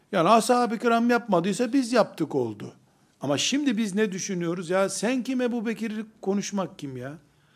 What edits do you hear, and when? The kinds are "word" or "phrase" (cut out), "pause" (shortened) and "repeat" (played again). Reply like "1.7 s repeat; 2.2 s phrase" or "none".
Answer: none